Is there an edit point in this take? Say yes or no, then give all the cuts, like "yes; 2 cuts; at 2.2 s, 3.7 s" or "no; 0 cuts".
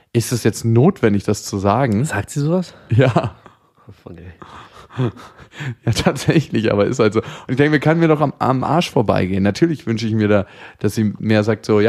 no; 0 cuts